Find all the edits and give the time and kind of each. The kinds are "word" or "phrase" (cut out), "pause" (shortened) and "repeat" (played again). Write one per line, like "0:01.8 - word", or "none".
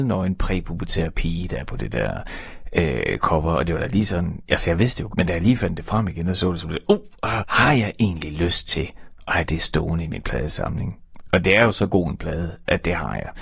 0:05.1 - word
0:07.4 - word